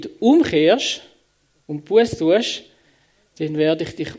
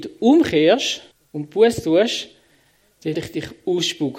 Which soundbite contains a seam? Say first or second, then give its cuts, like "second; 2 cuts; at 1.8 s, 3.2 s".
second; 2 cuts; at 1.1 s, 3.1 s